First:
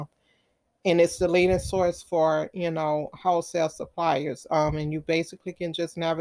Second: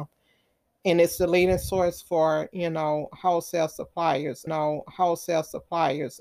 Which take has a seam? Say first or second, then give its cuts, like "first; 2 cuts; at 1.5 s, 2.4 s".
second; 1 cut; at 4.5 s